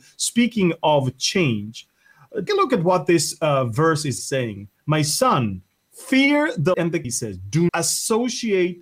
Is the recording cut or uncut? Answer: cut